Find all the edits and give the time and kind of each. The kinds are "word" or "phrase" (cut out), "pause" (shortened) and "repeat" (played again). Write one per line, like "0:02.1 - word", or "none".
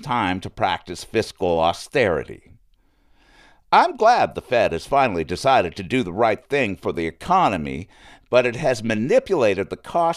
none